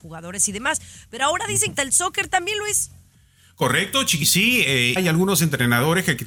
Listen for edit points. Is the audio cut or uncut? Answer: cut